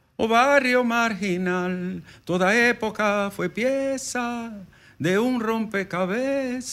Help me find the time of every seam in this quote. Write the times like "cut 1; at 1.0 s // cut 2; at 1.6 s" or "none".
none